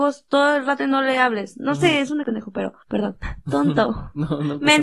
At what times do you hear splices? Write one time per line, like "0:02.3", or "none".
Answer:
0:02.2